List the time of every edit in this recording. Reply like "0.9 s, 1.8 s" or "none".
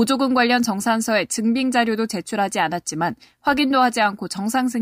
none